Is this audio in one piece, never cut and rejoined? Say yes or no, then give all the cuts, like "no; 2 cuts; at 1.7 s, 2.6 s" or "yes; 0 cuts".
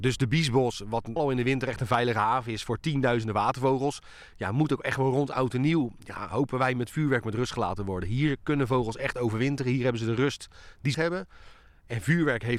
no; 2 cuts; at 1.2 s, 10.9 s